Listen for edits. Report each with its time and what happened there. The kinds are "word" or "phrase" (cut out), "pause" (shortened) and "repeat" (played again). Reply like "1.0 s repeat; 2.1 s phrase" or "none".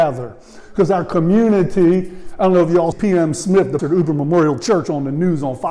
2.9 s word; 3.8 s word